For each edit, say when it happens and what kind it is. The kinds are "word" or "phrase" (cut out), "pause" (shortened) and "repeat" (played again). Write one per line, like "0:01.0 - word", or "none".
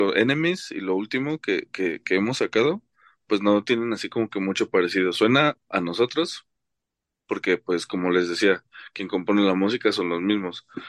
none